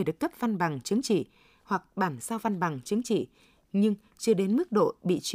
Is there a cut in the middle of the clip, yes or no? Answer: no